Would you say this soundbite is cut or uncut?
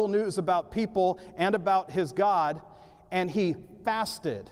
uncut